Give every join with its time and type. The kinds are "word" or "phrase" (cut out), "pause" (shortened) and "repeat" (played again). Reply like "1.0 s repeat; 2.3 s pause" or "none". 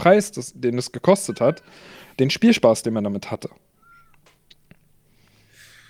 none